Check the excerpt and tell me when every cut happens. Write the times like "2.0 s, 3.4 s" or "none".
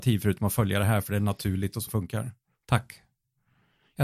1.9 s